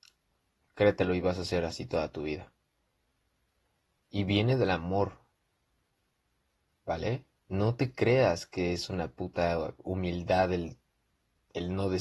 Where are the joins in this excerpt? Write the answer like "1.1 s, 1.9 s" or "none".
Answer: none